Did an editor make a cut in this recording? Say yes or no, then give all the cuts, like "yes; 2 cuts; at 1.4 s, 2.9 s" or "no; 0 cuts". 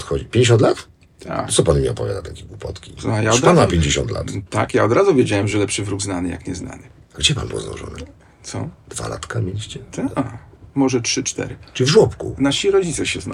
no; 0 cuts